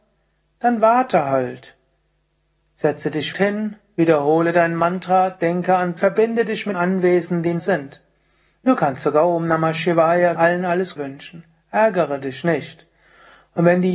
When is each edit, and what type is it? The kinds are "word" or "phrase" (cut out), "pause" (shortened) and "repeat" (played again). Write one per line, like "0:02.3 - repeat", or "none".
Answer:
0:03.3 - word
0:06.0 - word
0:06.7 - word
0:07.6 - word
0:10.3 - word
0:11.0 - word